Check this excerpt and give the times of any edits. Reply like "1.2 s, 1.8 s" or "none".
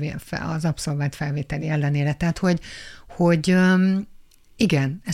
none